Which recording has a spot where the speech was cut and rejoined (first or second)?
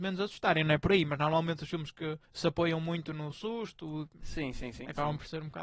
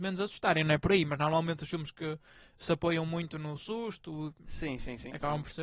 first